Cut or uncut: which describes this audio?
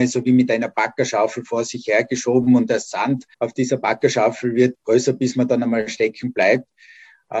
cut